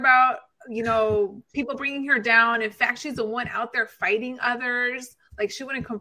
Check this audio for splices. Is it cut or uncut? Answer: uncut